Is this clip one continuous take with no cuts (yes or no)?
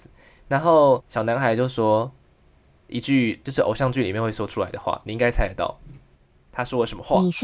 no